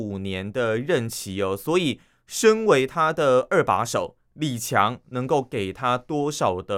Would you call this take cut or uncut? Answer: uncut